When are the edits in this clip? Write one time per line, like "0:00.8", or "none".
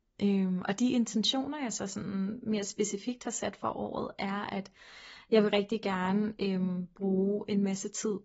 none